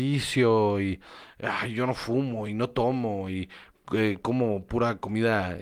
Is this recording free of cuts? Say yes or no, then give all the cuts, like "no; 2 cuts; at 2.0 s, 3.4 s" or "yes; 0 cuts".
yes; 0 cuts